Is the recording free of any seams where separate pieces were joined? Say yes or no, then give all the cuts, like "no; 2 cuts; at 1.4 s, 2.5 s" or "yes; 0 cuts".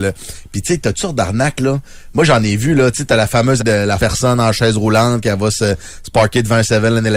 no; 3 cuts; at 0.9 s, 3.6 s, 4.0 s